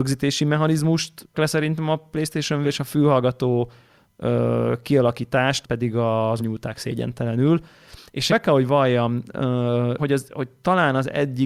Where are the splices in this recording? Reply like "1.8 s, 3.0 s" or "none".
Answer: 1.3 s, 2.6 s, 5.6 s, 6.4 s, 8.3 s, 10.0 s